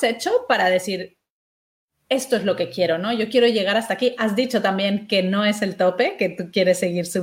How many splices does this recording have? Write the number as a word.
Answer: zero